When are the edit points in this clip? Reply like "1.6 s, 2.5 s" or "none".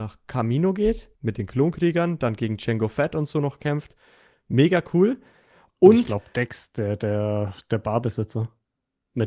1.2 s